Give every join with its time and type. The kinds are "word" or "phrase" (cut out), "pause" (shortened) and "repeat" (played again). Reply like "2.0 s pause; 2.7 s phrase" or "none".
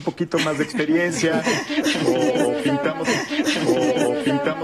3.0 s repeat